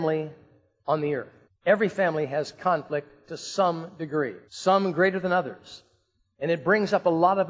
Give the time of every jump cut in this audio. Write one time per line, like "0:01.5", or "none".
0:01.4
0:04.5